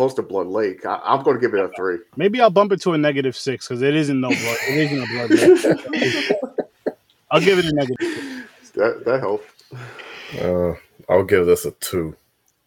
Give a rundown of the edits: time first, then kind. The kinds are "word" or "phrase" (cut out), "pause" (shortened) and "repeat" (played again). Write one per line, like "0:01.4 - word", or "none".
0:02.1 - pause
0:07.0 - pause